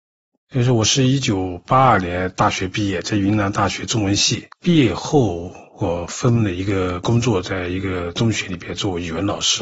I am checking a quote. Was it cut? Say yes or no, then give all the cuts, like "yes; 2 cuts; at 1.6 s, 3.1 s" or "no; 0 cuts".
yes; 1 cut; at 4.5 s